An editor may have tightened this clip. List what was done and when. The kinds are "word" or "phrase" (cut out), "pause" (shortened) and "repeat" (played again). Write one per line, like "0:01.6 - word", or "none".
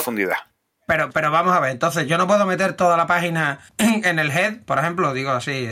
0:03.7 - pause